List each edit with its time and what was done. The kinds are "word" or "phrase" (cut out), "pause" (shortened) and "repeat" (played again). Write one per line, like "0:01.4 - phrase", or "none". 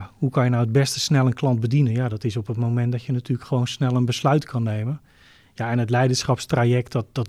none